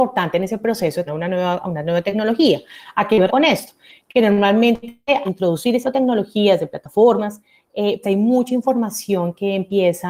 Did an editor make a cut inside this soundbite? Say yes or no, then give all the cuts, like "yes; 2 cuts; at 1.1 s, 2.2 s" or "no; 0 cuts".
yes; 5 cuts; at 1.1 s, 3.3 s, 5.2 s, 5.8 s, 8.0 s